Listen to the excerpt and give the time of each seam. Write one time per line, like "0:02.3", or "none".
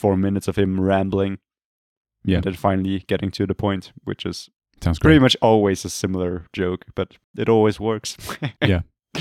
0:04.6